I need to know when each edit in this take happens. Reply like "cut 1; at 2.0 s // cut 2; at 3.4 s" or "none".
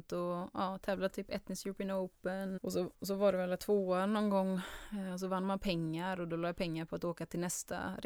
cut 1; at 2.6 s // cut 2; at 3.6 s